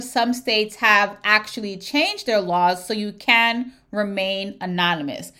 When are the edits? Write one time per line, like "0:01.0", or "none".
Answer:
none